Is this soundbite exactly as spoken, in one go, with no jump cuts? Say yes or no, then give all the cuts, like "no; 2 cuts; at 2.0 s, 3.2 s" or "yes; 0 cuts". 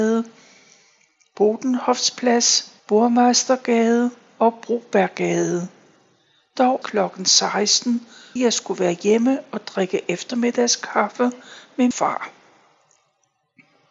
no; 4 cuts; at 2.8 s, 6.8 s, 8.4 s, 11.9 s